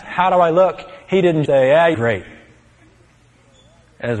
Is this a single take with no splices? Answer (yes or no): no